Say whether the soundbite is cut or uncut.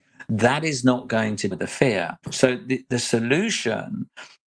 cut